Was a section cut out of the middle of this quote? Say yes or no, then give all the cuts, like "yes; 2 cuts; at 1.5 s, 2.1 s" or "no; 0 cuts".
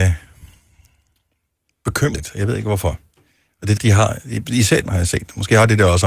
yes; 3 cuts; at 2.1 s, 3.8 s, 4.8 s